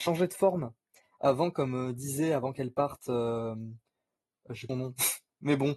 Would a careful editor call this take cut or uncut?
cut